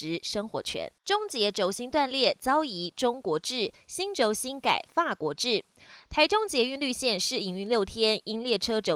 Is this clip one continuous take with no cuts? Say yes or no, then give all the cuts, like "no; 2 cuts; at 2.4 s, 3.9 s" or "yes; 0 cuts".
no; 1 cut; at 1.0 s